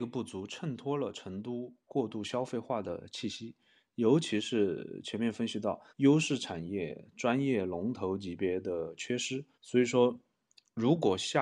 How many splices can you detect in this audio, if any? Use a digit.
2